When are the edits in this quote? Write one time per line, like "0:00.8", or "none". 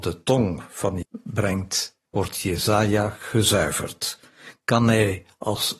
0:01.0
0:02.1